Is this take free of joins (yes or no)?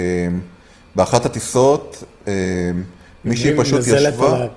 yes